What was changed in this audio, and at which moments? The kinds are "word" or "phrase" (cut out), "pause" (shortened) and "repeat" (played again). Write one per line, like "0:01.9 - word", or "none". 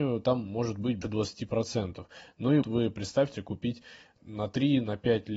0:01.0 - word
0:02.6 - word
0:03.3 - word
0:04.2 - word